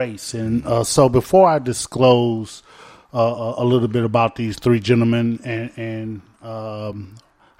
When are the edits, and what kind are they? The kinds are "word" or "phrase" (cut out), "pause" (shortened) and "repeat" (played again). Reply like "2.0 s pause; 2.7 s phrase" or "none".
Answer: none